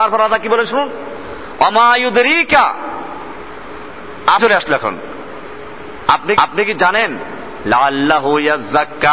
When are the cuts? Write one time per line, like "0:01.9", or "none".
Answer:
0:04.4
0:06.4